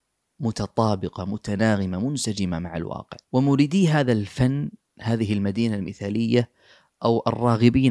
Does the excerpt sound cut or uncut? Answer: uncut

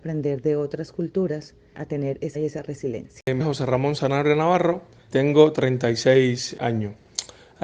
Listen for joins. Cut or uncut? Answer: cut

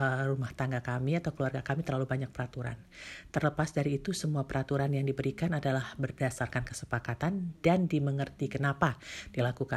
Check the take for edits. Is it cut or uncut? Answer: uncut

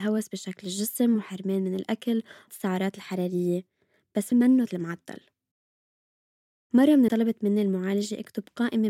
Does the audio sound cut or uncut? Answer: cut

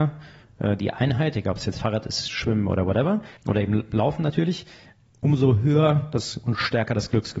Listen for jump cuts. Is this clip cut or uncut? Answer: cut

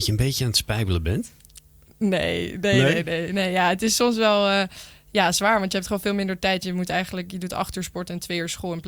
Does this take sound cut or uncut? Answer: uncut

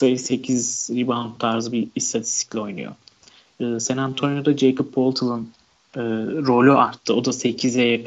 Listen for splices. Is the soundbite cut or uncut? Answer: uncut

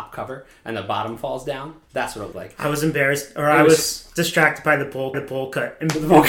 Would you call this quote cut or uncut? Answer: cut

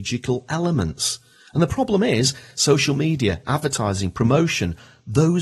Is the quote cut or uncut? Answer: uncut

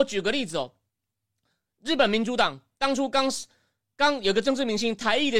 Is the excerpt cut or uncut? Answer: uncut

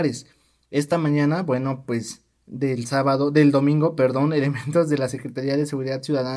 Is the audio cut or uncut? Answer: uncut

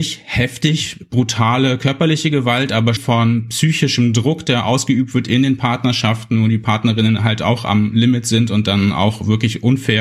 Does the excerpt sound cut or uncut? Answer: cut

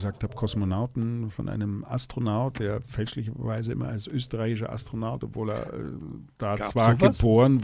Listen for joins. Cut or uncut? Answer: uncut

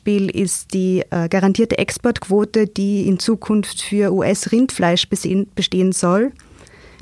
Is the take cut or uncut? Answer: uncut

